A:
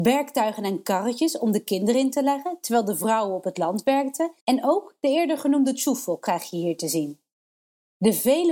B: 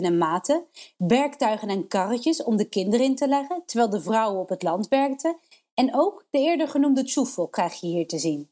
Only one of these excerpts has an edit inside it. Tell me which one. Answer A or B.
A